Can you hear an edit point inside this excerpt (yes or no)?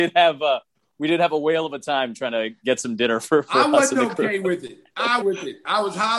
yes